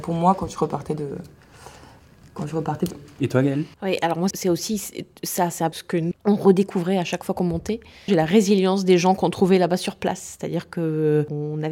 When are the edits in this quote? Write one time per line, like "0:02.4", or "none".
0:02.9
0:03.7
0:04.3
0:05.7
0:06.1
0:08.1